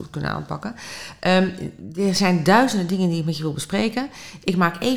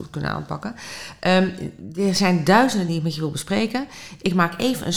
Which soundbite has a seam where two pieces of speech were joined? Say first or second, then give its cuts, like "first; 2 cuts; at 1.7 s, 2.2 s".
second; 1 cut; at 2.9 s